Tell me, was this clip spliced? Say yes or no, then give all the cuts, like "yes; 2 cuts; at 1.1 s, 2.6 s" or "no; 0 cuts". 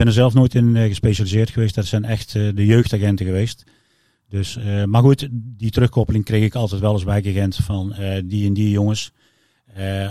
no; 0 cuts